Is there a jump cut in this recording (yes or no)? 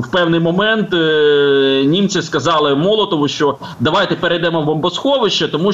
no